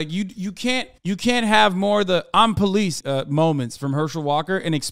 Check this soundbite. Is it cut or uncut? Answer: cut